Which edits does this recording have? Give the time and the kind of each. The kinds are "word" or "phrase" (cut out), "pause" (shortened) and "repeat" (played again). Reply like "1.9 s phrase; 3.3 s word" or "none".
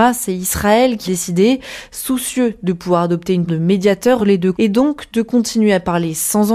1.1 s word; 3.5 s word; 4.2 s word; 4.5 s word